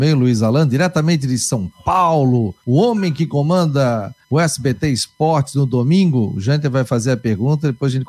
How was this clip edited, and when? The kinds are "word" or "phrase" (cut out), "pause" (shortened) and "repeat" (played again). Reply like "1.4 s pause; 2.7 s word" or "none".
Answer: 2.6 s pause; 4.2 s pause